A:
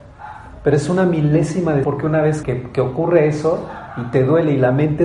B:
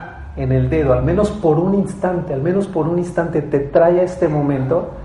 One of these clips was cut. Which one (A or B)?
A